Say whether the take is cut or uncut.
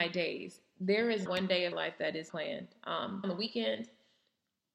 cut